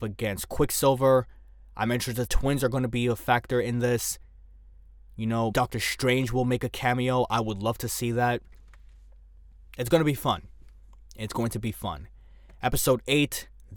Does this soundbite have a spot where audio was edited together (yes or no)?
yes